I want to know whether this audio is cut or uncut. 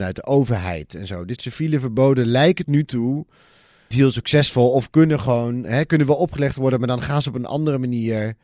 cut